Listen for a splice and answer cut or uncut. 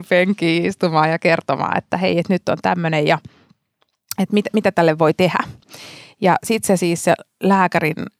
uncut